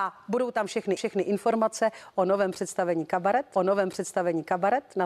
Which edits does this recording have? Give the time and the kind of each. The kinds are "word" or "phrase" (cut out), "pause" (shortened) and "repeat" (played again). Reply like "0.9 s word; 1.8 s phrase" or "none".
1.0 s repeat; 3.6 s repeat